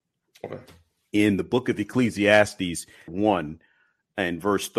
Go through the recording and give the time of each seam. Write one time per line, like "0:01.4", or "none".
0:03.1